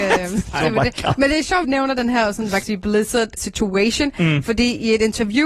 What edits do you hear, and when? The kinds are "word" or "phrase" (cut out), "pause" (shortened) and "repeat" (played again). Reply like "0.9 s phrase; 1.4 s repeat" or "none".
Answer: 1.6 s word; 2.6 s word; 3.4 s word